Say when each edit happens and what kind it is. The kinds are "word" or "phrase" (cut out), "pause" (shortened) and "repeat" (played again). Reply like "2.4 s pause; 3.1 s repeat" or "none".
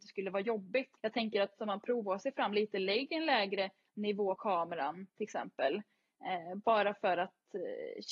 1.0 s pause; 1.6 s phrase; 4.4 s word